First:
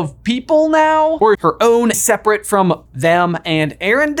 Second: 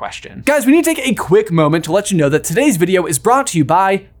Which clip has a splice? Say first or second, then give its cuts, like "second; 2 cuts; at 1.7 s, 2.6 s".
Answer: first; 3 cuts; at 1.3 s, 1.9 s, 2.9 s